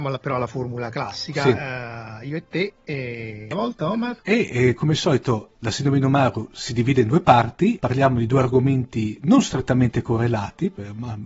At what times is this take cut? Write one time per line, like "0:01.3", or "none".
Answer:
0:03.5
0:04.2
0:05.5
0:07.8